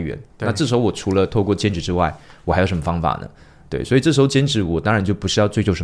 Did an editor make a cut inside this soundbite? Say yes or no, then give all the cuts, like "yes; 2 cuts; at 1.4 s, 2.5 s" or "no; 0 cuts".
no; 0 cuts